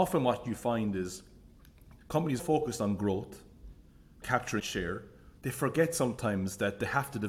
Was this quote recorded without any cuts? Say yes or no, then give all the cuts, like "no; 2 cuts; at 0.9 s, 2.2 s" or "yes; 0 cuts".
no; 5 cuts; at 2.0 s, 2.4 s, 4.2 s, 4.6 s, 5.4 s